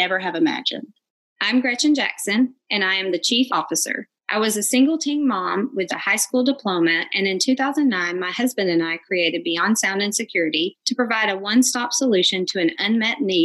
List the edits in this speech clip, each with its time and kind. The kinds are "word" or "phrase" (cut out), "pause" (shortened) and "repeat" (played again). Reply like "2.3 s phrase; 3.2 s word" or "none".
3.5 s word; 5.9 s word